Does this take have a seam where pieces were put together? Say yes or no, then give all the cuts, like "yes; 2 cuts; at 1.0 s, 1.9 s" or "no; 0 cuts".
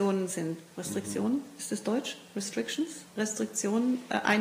yes; 1 cut; at 3.1 s